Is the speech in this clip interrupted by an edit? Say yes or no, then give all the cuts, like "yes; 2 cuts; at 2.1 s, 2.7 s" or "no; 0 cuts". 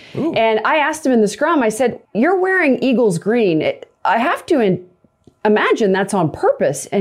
yes; 1 cut; at 2.0 s